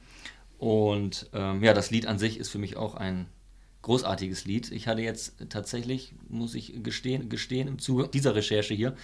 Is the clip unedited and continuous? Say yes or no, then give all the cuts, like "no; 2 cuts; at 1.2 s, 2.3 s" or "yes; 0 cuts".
no; 1 cut; at 7.2 s